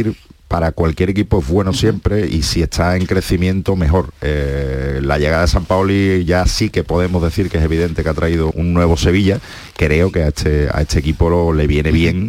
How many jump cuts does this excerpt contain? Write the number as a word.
two